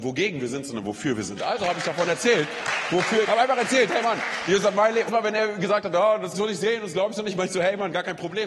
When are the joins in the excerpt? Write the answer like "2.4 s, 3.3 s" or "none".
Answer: 3.2 s, 5.1 s, 6.3 s